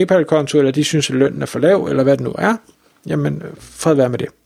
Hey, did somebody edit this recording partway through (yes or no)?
no